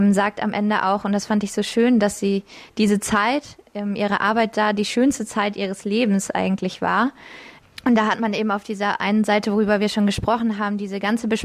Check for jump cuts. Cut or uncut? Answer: uncut